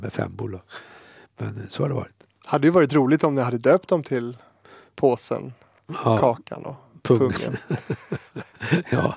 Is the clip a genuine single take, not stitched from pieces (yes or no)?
yes